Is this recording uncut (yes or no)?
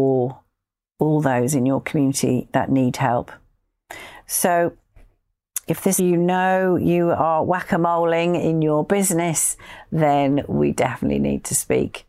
no